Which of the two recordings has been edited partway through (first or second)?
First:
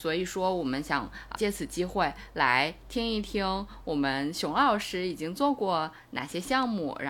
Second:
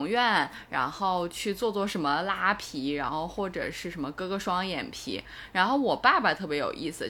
first